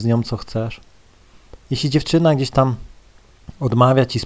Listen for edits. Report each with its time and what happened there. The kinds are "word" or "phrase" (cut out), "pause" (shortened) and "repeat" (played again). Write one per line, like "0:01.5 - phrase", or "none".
0:01.6 - pause